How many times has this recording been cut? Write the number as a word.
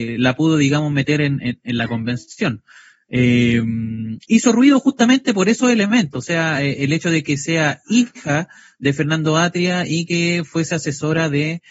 zero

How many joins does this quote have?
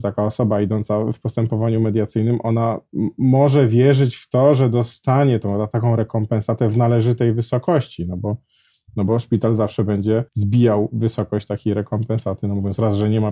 one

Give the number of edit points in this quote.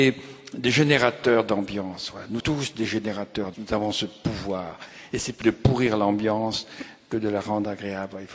three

